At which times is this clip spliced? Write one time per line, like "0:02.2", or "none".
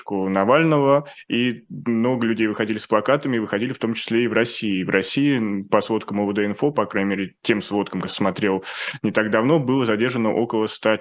0:08.0

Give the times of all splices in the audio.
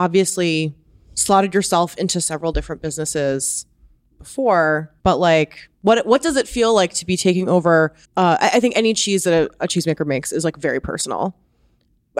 0:05.0
0:05.7
0:08.0

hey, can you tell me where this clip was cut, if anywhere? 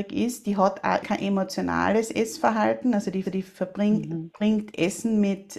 0:01.0
0:03.2

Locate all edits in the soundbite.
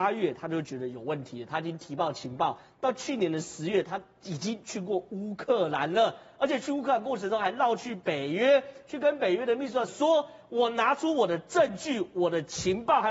0:09.9

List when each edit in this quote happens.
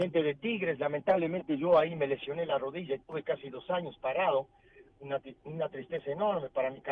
none

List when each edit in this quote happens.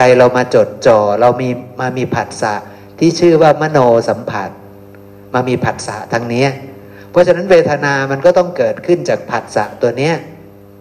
none

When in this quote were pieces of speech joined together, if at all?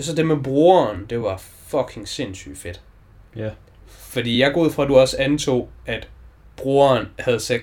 none

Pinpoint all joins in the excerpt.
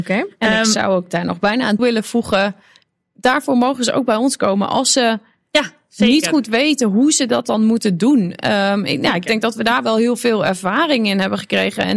0:01.8

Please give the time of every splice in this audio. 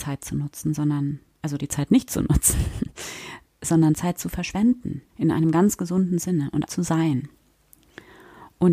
0:01.6
0:05.1
0:06.7

